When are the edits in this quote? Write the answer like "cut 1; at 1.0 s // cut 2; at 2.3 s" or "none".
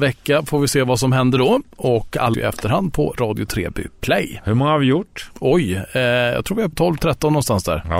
cut 1; at 2.3 s // cut 2; at 6.7 s